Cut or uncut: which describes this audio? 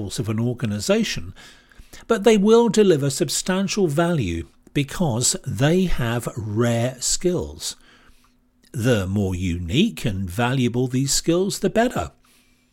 uncut